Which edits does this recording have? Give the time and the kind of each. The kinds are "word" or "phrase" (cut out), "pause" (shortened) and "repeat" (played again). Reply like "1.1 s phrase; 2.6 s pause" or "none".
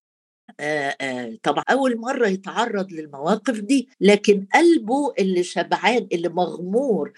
1.6 s word; 3.9 s pause